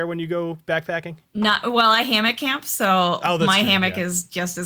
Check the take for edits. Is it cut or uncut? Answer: cut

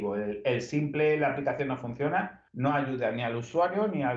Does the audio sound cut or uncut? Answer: cut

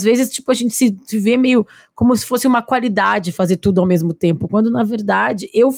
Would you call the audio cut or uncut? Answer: uncut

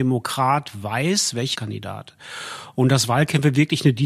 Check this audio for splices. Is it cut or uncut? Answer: cut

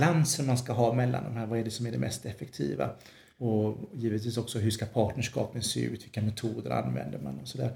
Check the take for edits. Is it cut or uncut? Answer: uncut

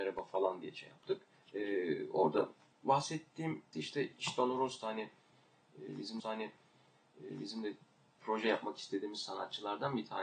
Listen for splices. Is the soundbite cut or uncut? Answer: cut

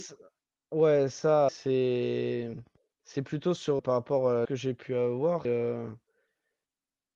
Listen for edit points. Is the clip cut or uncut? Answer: cut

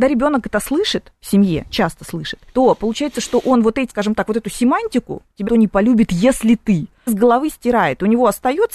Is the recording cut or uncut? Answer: cut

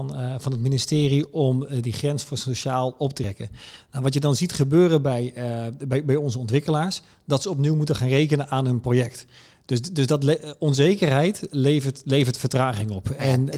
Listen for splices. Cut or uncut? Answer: uncut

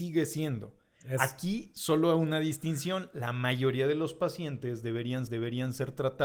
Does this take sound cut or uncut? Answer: cut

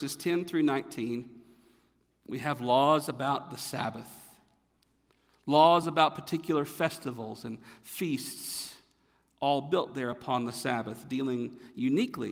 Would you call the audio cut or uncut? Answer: uncut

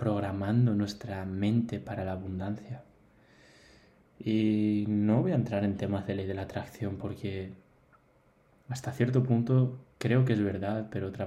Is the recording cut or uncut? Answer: uncut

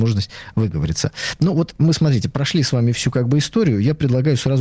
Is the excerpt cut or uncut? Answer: uncut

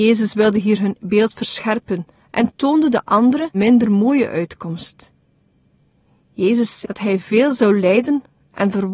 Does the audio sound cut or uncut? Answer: cut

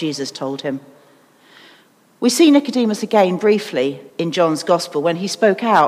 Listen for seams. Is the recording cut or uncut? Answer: cut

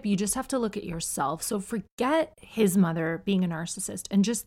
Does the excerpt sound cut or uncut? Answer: uncut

